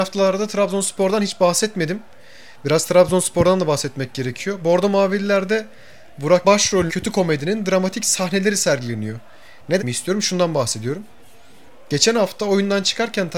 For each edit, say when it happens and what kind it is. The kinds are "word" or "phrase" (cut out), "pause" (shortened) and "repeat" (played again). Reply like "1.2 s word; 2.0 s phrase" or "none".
6.4 s word; 6.9 s word; 9.8 s word